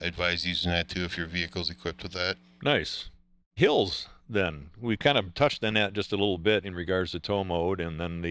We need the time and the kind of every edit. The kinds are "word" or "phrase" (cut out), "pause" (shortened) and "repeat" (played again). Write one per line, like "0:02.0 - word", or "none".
none